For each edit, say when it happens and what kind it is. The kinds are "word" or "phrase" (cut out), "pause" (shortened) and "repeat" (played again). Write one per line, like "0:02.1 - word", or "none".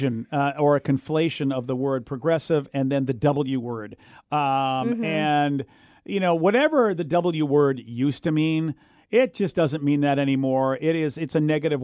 none